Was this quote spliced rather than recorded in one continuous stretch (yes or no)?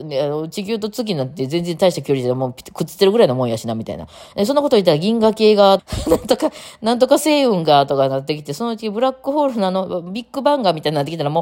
yes